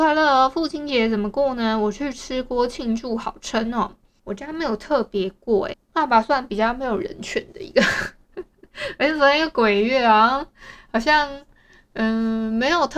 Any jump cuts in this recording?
yes; 1 cut; at 5.7 s

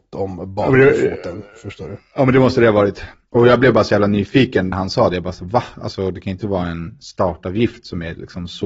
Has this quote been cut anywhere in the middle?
yes; 1 cut; at 4.7 s

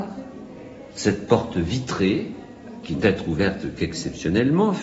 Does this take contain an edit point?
yes; 1 cut; at 3.0 s

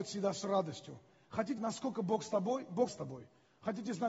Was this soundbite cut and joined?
yes; 2 cuts; at 1.6 s, 2.9 s

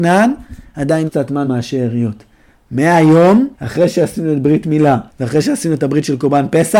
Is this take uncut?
no; 4 cuts; at 1.1 s, 1.4 s, 3.5 s, 5.1 s

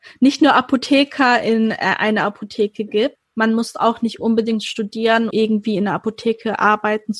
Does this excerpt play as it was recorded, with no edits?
no; 1 cut; at 5.3 s

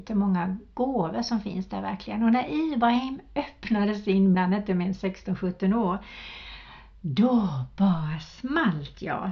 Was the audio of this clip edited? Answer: yes; 1 cut; at 4.3 s

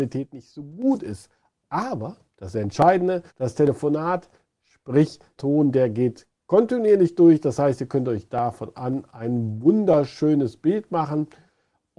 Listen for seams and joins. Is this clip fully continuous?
no; 3 cuts; at 3.3 s, 5.4 s, 8.7 s

